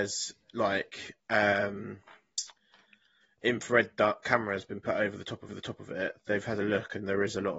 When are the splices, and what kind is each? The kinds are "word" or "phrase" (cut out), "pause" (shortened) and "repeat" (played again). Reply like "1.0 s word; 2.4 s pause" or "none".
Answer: 1.2 s pause; 5.5 s repeat